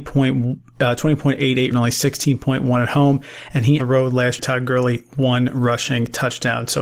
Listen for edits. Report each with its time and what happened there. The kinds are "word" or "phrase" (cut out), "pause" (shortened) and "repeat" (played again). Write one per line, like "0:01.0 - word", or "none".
0:01.7 - phrase
0:03.8 - phrase
0:04.4 - word